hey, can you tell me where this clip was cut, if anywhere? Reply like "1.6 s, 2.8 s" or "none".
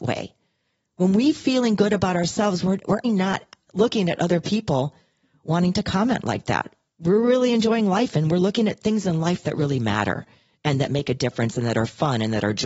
3.0 s